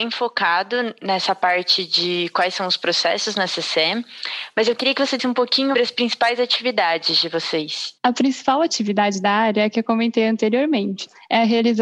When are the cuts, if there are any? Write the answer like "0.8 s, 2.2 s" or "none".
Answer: 5.2 s, 5.7 s, 8.0 s